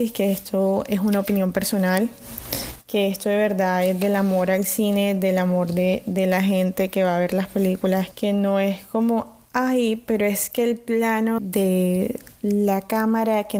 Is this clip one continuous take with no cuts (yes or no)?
no